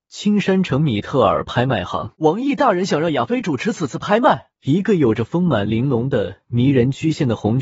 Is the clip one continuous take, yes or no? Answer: no